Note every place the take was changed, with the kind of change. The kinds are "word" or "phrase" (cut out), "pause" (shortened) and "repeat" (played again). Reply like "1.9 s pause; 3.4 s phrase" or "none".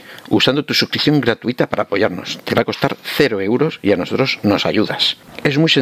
none